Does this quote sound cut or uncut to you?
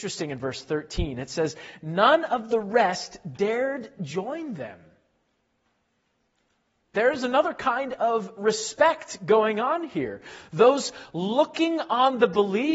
uncut